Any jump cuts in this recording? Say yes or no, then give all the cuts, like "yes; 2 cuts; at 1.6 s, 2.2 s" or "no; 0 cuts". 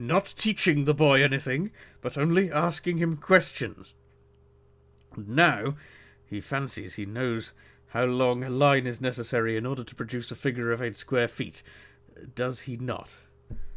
no; 0 cuts